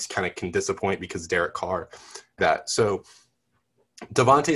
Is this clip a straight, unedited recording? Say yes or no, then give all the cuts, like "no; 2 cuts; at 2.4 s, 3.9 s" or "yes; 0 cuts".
no; 1 cut; at 2.4 s